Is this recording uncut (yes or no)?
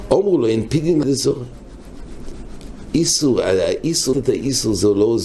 no